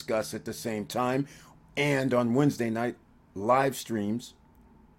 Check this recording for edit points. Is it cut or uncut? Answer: uncut